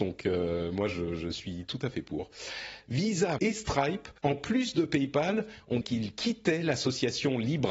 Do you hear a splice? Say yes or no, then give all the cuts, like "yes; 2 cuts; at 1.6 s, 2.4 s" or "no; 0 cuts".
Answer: yes; 3 cuts; at 3.4 s, 4.2 s, 5.8 s